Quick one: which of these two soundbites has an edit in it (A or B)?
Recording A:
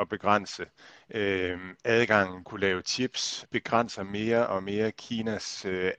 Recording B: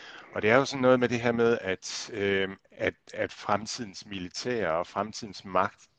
A